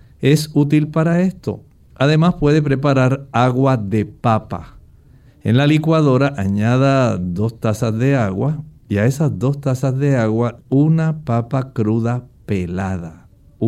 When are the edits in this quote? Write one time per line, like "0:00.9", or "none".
0:10.6

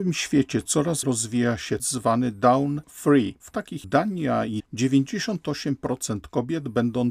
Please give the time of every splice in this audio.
0:01.0
0:01.8
0:02.8
0:03.5
0:03.8
0:04.6

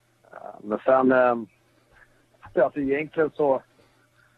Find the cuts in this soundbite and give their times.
0:02.5

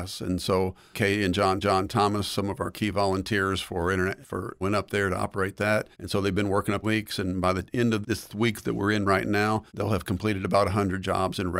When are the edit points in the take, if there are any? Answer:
0:00.9
0:01.6
0:04.2
0:04.6
0:05.9
0:06.8
0:08.0
0:09.7

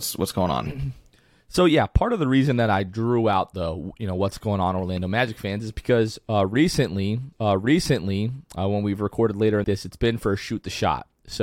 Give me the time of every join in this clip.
0:07.3
0:09.6

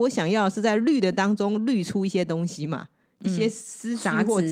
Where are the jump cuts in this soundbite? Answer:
none

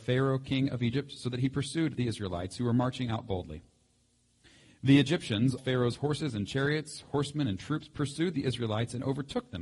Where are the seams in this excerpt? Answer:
0:05.6

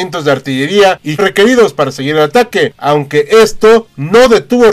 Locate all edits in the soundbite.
0:01.2

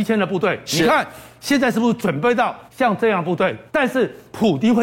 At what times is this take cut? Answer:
0:02.7
0:03.7

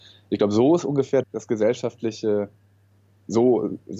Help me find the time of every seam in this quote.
0:01.2

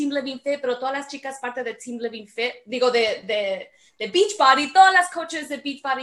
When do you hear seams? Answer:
none

